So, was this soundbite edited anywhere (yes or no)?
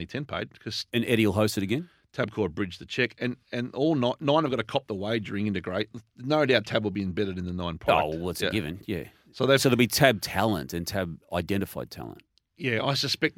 no